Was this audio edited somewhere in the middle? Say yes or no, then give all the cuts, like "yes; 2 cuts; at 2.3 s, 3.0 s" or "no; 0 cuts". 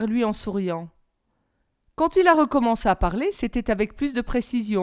no; 0 cuts